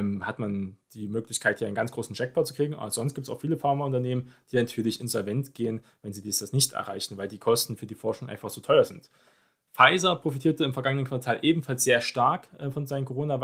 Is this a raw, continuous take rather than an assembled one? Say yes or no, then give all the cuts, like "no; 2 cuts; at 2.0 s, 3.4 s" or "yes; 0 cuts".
yes; 0 cuts